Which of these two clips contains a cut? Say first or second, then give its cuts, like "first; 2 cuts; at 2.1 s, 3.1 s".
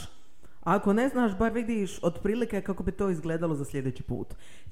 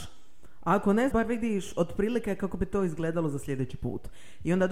second; 1 cut; at 1.1 s